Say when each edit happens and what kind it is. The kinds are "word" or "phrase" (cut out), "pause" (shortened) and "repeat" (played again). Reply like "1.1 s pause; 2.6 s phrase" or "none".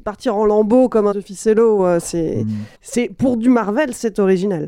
1.1 s word; 2.7 s pause